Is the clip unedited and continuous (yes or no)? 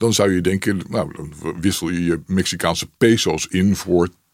yes